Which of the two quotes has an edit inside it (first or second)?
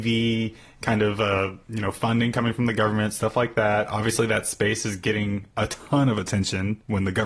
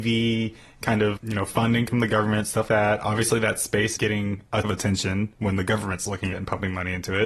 second